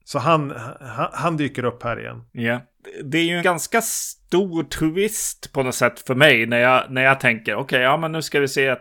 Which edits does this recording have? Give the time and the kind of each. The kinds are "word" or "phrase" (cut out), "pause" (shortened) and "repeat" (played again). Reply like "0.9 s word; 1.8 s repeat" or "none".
3.4 s word